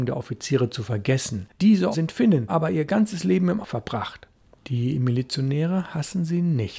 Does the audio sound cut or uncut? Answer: cut